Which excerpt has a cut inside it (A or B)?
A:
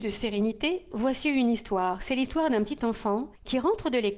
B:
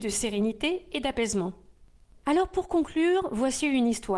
A